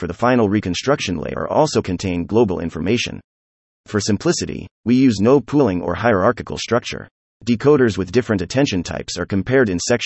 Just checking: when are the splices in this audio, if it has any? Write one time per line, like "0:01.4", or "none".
none